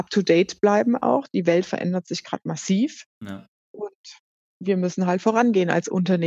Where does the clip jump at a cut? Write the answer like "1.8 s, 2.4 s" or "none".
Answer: none